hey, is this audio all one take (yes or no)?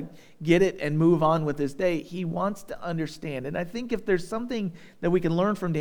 yes